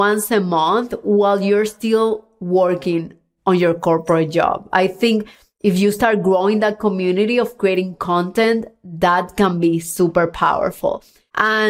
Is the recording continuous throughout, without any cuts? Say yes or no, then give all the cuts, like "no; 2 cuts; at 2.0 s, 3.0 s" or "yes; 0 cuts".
yes; 0 cuts